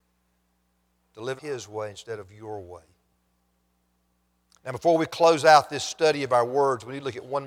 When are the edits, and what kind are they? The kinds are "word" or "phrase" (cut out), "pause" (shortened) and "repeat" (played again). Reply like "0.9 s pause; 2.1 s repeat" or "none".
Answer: 1.4 s word